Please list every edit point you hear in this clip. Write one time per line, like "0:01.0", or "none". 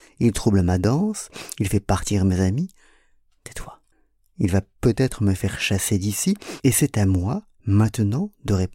0:03.9